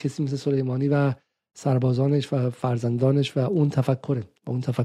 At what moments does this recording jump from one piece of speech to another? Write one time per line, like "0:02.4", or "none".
none